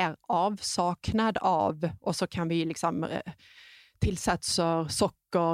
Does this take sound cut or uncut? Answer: uncut